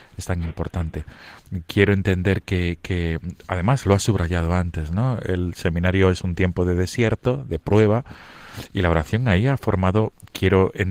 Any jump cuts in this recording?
no; 0 cuts

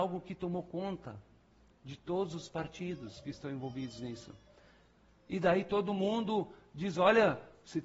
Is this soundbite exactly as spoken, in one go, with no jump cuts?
yes; 0 cuts

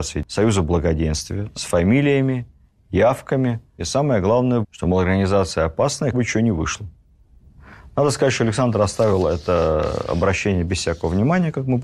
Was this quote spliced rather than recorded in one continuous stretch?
yes; 3 cuts; at 3.8 s, 4.6 s, 6.1 s

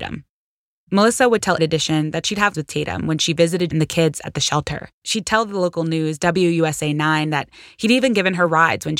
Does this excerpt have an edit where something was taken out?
yes; 4 cuts; at 1.6 s, 2.5 s, 3.7 s, 4.9 s

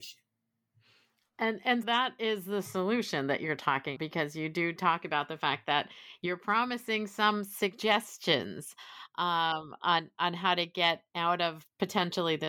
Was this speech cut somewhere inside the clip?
yes; 3 cuts; at 1.8 s, 4.0 s, 10.1 s

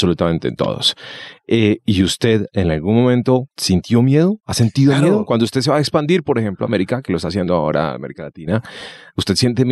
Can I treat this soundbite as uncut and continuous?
no; 1 cut; at 3.5 s

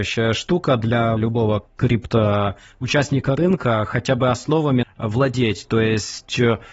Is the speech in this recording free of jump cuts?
no; 2 cuts; at 1.2 s, 4.8 s

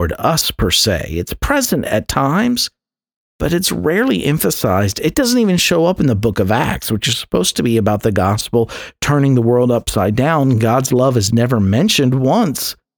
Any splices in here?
no; 0 cuts

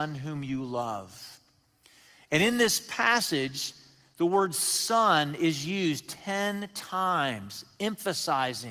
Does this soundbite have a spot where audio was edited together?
no; 0 cuts

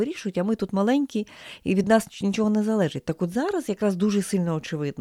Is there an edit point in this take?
no; 0 cuts

